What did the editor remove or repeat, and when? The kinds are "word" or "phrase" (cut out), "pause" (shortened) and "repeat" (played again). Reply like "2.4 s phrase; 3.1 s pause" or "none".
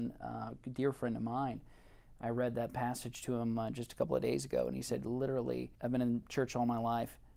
5.8 s pause